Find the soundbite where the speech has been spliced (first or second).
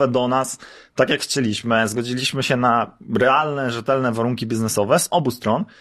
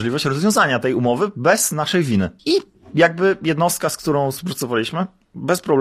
second